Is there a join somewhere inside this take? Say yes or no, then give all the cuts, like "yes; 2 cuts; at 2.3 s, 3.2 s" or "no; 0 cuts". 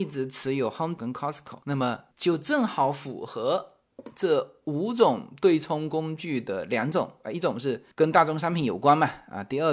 yes; 2 cuts; at 1.0 s, 2.1 s